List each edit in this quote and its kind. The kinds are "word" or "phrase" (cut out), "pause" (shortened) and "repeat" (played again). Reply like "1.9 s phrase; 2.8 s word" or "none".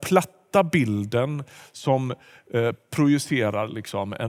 none